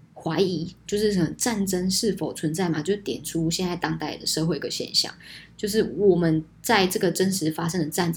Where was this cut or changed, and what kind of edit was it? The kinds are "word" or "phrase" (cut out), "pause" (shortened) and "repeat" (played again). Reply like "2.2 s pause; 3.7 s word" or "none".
6.5 s pause